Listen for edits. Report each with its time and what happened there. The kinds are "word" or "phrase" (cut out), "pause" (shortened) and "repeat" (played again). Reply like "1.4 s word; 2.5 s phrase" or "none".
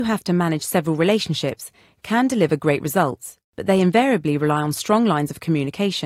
3.5 s pause